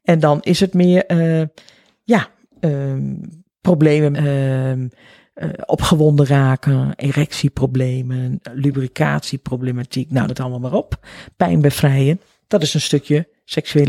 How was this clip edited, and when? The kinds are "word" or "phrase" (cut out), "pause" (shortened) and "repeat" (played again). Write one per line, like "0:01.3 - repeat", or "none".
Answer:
0:04.1 - word
0:10.3 - word